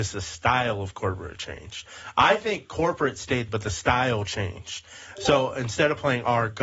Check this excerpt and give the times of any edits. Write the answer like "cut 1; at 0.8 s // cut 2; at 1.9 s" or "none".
cut 1; at 3.5 s